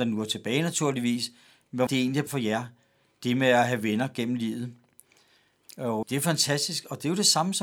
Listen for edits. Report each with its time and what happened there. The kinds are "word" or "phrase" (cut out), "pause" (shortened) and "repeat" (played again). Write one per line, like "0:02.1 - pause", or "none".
0:01.9 - word
0:02.3 - word
0:06.0 - word